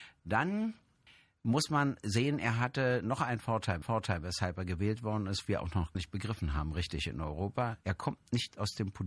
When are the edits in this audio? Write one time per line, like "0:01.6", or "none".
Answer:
0:01.1
0:03.8
0:05.4
0:05.9
0:07.8